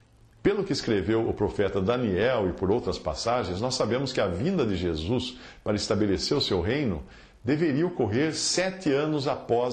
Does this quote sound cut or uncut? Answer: uncut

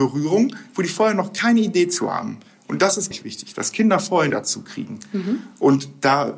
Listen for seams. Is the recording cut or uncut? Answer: cut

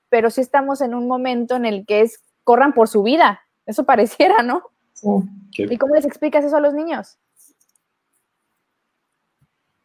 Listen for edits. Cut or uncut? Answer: cut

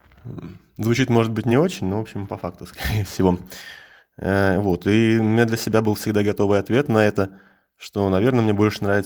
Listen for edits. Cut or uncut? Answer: uncut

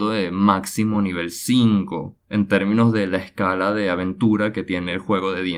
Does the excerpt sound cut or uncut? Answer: uncut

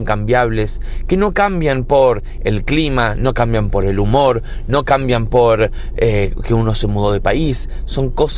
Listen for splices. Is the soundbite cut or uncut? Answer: uncut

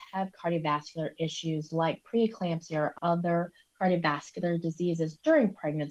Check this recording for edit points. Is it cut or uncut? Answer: uncut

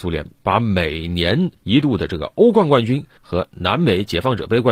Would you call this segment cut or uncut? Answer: cut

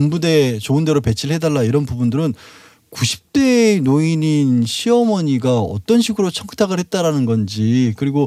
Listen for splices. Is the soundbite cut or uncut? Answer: uncut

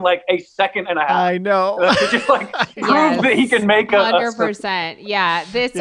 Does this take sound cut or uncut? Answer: uncut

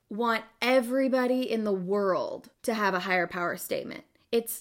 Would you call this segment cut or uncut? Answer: cut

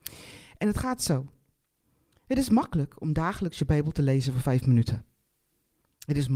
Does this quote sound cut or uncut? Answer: uncut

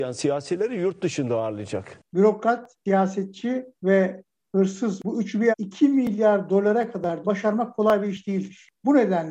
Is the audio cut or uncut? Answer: cut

